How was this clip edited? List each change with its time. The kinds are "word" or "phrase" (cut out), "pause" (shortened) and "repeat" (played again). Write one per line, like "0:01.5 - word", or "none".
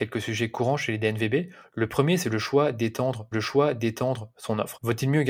0:03.3 - repeat